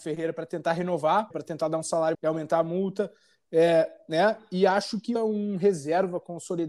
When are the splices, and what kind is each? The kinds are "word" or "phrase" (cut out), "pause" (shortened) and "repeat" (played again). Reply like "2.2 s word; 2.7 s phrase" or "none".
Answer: 1.3 s word; 2.1 s word; 5.1 s phrase